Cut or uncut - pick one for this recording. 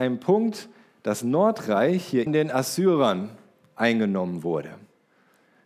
cut